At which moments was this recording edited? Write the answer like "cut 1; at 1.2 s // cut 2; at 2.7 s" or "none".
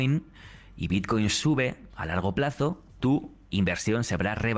cut 1; at 2.9 s